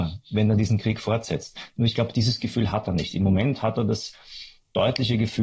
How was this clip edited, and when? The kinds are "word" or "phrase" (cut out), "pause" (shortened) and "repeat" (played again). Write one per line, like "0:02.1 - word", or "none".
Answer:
none